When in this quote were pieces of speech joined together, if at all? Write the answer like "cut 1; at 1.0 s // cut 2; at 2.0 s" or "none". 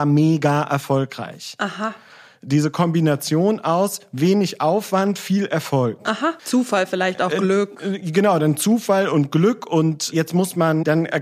cut 1; at 6.4 s